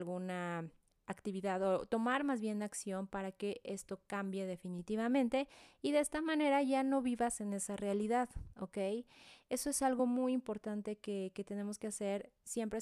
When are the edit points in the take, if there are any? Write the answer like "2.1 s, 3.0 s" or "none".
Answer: none